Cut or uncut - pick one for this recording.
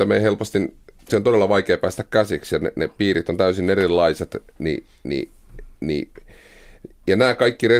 cut